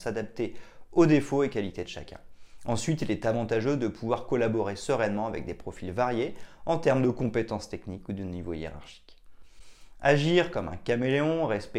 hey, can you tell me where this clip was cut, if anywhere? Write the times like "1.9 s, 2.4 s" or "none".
none